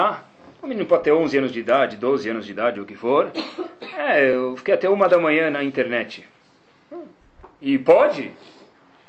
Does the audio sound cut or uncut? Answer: uncut